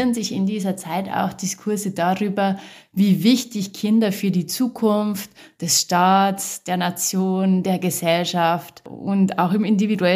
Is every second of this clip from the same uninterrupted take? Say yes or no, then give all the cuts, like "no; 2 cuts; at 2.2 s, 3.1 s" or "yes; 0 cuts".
yes; 0 cuts